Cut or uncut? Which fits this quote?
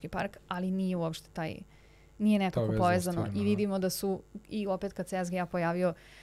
uncut